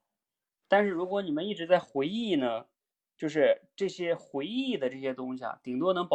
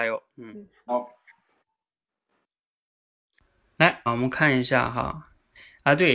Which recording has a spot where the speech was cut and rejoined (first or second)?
second